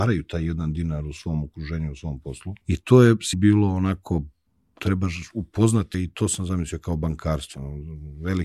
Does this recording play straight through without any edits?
no; 4 cuts; at 2.6 s, 3.3 s, 4.5 s, 5.9 s

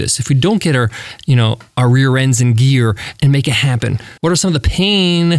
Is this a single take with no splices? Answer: no; 1 cut; at 4.2 s

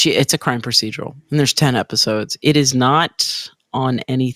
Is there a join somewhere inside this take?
no; 0 cuts

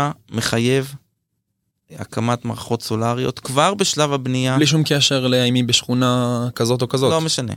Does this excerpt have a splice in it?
no; 0 cuts

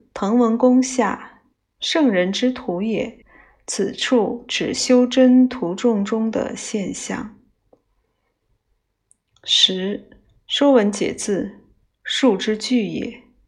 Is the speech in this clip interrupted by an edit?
yes; 3 cuts; at 1.5 s, 3.2 s, 10.4 s

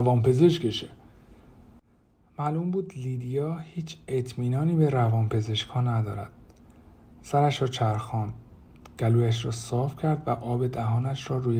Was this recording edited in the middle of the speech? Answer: no; 0 cuts

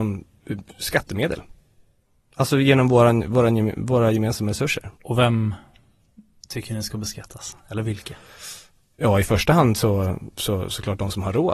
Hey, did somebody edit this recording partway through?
yes; 1 cut; at 4.9 s

